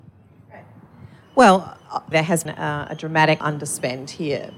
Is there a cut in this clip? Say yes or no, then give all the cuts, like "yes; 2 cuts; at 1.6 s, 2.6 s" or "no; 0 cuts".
yes; 3 cuts; at 2.1 s, 2.5 s, 3.4 s